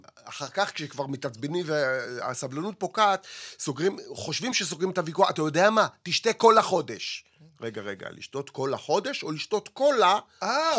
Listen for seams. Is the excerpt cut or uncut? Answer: uncut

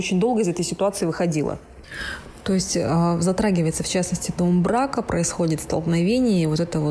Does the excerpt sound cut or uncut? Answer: uncut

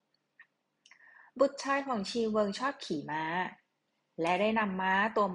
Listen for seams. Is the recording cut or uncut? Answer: uncut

